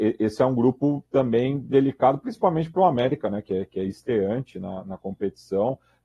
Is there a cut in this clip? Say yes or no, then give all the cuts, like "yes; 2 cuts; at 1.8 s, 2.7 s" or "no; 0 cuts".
yes; 1 cut; at 1.1 s